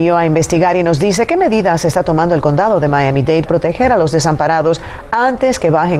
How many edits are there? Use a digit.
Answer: 1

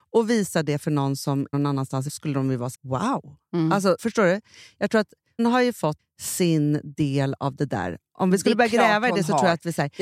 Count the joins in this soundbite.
6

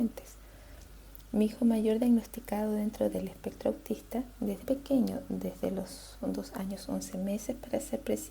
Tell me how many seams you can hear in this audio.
1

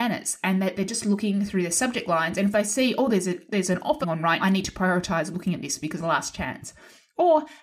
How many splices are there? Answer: 3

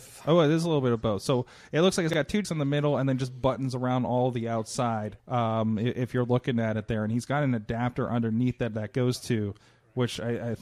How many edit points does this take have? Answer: 2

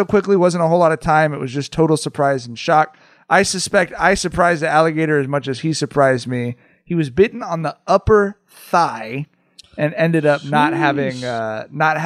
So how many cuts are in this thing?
0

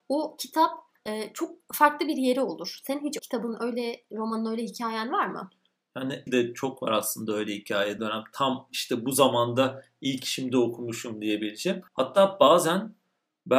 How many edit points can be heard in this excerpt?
5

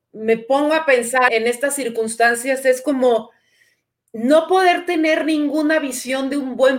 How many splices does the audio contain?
1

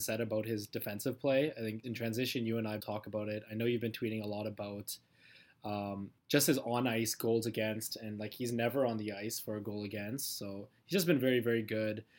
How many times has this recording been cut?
3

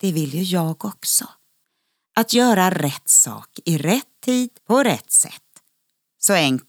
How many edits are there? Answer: 2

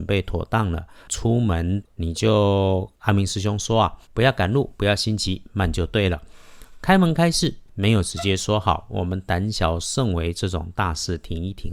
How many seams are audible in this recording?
1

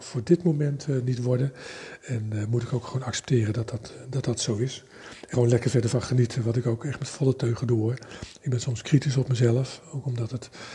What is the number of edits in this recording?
1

